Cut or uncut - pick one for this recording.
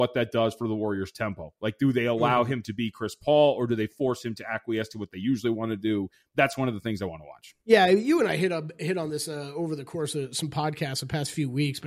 uncut